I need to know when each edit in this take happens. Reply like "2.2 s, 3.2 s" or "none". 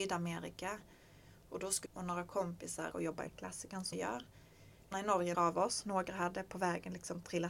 1.9 s, 2.9 s, 3.3 s, 3.9 s, 4.9 s, 5.3 s